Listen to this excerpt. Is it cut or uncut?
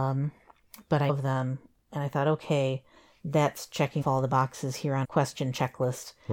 cut